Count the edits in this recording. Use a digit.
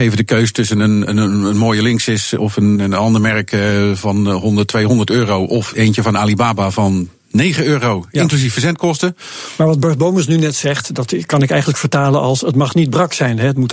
2